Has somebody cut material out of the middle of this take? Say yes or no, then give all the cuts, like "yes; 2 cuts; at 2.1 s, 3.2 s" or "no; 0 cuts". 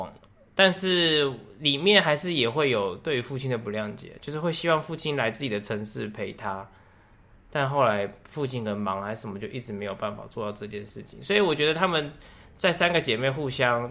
no; 0 cuts